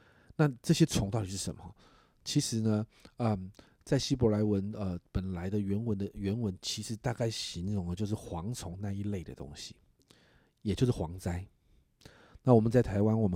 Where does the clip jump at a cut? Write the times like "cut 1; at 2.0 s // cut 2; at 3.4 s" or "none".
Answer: none